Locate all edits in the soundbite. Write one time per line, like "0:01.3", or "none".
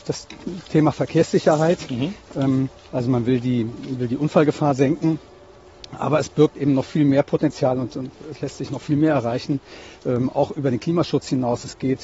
0:02.8